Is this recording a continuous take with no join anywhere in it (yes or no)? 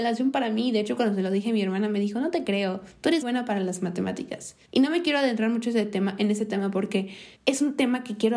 no